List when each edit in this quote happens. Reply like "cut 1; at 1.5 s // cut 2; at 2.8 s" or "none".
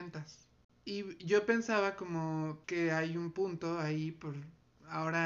cut 1; at 2.6 s